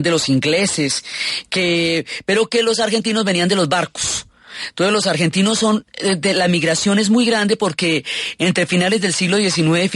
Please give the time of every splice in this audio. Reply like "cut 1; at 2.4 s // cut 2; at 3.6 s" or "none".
none